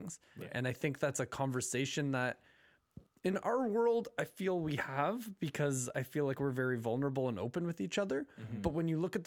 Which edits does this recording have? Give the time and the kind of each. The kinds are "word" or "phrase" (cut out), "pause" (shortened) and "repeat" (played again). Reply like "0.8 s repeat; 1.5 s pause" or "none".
none